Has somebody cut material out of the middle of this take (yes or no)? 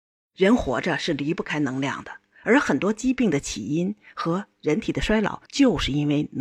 yes